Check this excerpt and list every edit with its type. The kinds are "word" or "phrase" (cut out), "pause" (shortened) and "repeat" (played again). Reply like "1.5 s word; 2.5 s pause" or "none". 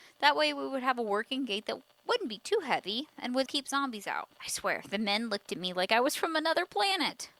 3.5 s word; 4.3 s pause